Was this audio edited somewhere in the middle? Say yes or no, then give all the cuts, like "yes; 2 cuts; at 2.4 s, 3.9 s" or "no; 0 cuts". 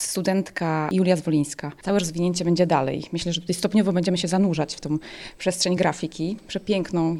no; 0 cuts